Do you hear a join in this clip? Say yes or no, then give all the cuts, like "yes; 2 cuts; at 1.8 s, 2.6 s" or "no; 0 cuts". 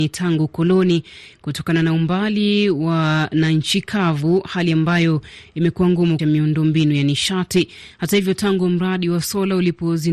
yes; 1 cut; at 6.2 s